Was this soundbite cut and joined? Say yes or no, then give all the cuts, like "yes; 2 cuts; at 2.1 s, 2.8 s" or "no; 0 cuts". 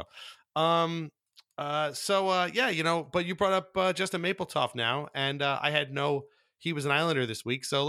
no; 0 cuts